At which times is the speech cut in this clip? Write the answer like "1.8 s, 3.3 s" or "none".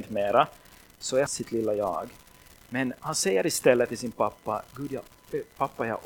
1.3 s